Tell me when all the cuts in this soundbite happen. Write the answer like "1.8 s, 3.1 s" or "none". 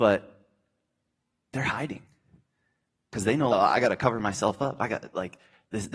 3.5 s